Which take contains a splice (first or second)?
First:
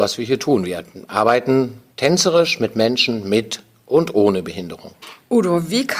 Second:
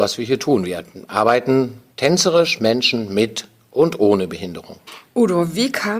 second